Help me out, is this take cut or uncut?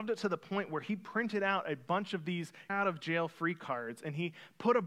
cut